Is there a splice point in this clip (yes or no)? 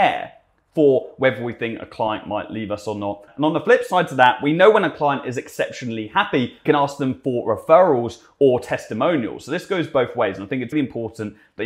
yes